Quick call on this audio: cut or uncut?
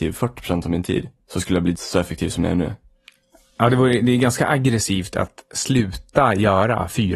cut